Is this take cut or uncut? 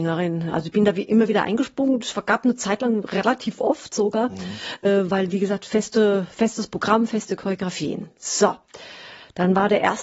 uncut